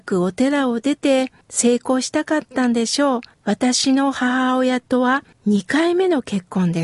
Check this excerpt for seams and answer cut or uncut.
cut